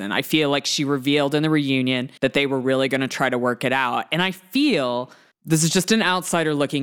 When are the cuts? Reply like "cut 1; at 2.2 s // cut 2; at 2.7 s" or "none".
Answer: cut 1; at 2.2 s // cut 2; at 5.3 s